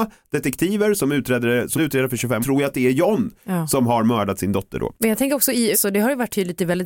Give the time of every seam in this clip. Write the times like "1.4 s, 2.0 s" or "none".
1.8 s, 2.4 s, 5.0 s, 5.7 s